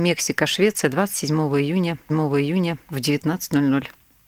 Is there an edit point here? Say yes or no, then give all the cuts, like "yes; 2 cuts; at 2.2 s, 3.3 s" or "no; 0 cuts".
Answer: yes; 1 cut; at 2.1 s